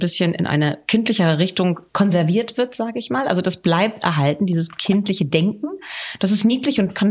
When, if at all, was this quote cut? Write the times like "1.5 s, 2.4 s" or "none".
1.9 s